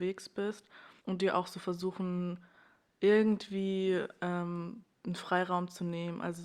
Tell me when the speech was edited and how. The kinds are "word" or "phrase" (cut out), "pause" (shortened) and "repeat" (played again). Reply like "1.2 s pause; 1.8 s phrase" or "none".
1.0 s pause; 4.9 s pause